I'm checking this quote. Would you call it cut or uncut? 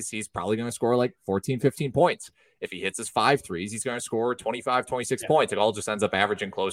uncut